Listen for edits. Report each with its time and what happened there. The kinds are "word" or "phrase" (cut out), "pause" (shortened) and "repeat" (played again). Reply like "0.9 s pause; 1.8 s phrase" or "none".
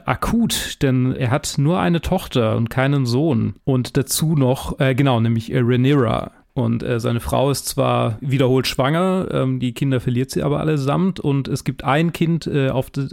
1.2 s word